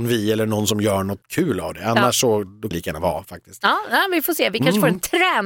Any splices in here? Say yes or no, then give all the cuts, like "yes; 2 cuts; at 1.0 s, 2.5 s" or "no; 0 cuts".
yes; 2 cuts; at 1.2 s, 2.7 s